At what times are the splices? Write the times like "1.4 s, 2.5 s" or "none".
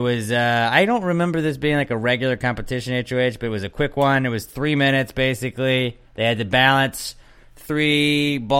6.0 s